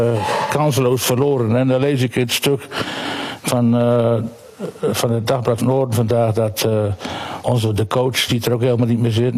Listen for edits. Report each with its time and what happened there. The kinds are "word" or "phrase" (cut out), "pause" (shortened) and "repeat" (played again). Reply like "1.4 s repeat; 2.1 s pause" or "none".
5.6 s word; 8.3 s word

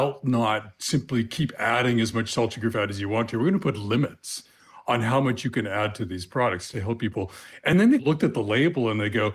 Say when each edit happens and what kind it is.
none

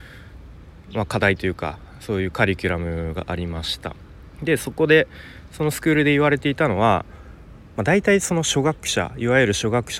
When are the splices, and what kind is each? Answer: 4.4 s phrase

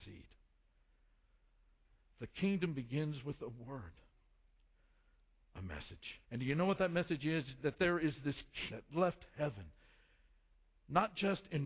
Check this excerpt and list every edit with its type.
6.2 s pause; 8.7 s word

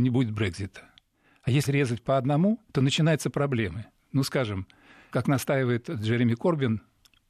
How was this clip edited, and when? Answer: 1.7 s word; 2.7 s pause; 5.1 s word

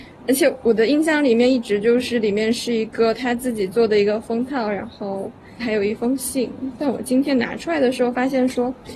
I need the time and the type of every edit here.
5.6 s word

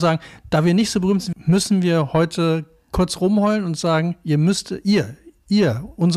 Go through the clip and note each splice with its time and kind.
1.3 s phrase

